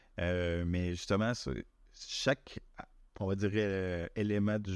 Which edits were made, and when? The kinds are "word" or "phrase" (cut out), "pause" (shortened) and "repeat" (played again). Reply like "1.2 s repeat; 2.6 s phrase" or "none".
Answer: none